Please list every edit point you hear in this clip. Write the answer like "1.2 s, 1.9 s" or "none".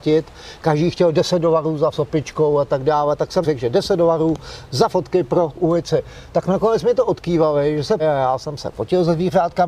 1.9 s, 3.4 s, 4.9 s, 5.6 s, 8.0 s